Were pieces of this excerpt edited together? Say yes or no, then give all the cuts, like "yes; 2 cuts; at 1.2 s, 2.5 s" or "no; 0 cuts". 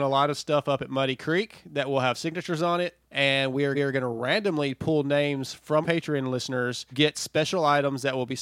yes; 4 cuts; at 3.0 s, 3.7 s, 5.8 s, 6.9 s